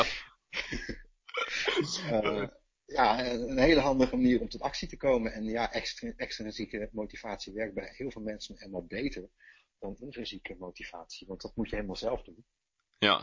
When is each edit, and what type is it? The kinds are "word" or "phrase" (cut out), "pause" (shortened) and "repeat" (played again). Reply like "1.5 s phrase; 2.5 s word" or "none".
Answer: none